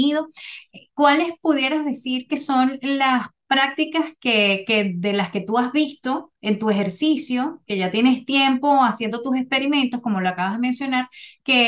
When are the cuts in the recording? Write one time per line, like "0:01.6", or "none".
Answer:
0:06.4